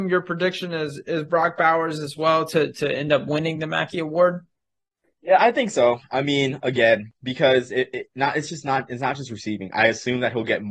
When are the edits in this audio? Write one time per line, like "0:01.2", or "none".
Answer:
none